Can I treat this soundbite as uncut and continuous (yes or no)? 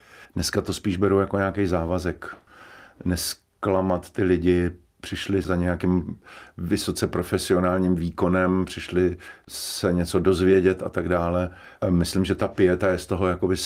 yes